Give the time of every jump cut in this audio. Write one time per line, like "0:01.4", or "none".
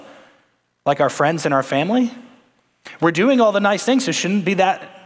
none